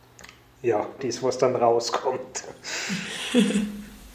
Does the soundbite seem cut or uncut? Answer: cut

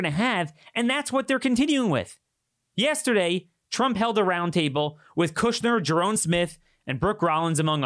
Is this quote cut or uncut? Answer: uncut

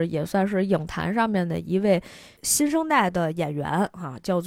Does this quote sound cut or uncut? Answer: cut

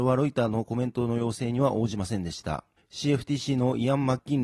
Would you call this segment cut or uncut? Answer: uncut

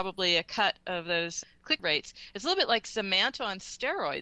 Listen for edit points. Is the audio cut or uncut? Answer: cut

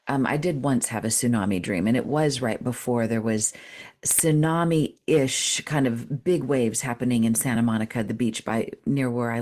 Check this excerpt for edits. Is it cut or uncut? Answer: uncut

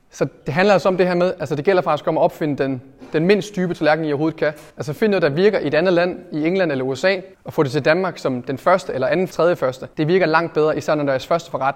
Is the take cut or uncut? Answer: cut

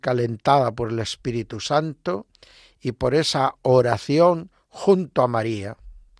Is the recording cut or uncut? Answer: uncut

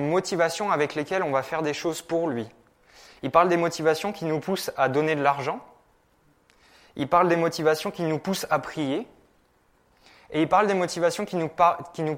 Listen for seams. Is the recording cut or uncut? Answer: uncut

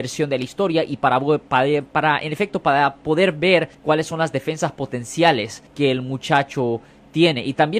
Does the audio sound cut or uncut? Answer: cut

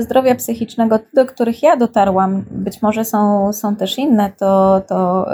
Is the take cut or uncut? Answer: uncut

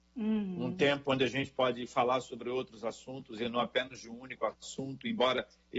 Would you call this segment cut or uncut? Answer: uncut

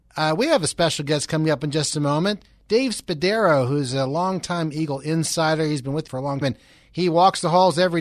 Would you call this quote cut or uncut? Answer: cut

